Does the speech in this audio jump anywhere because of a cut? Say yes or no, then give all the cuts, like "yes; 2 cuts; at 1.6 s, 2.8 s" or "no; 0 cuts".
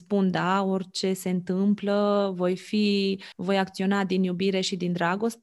yes; 1 cut; at 3.3 s